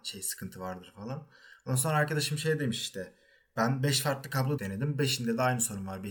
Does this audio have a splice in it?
yes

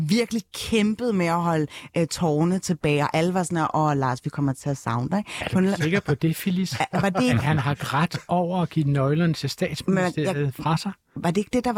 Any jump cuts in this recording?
no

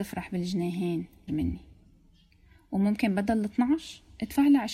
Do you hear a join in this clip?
yes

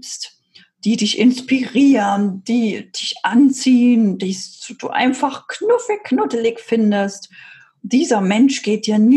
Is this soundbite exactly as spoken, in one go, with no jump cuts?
yes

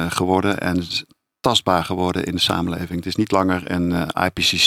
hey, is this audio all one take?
yes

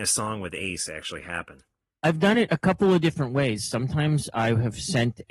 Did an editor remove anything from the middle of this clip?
no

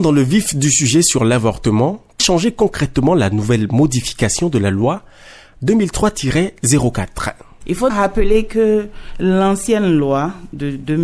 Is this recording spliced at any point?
yes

